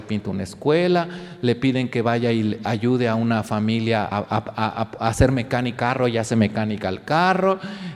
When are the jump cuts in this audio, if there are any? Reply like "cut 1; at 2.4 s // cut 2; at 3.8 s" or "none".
cut 1; at 4.1 s // cut 2; at 5.8 s